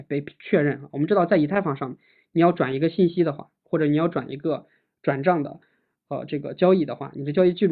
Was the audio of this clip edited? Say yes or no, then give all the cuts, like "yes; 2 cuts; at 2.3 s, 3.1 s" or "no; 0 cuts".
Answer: no; 0 cuts